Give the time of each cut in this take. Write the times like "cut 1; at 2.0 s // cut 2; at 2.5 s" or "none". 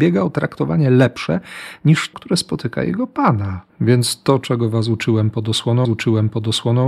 cut 1; at 2.1 s // cut 2; at 3.7 s // cut 3; at 5.8 s